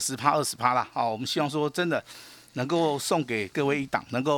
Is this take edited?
no; 0 cuts

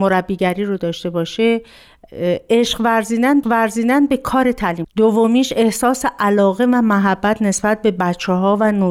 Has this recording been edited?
yes; 2 cuts; at 3.4 s, 4.8 s

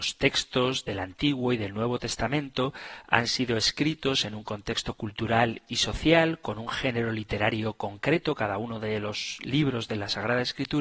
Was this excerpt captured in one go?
yes; 0 cuts

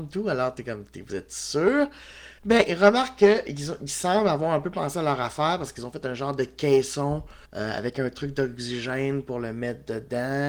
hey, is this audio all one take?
no; 2 cuts; at 2.4 s, 7.5 s

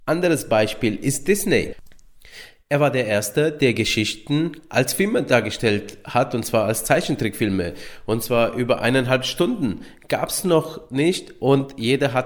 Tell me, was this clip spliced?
no; 0 cuts

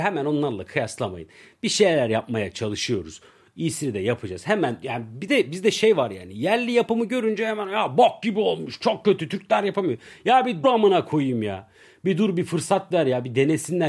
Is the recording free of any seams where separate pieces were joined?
no; 1 cut; at 10.6 s

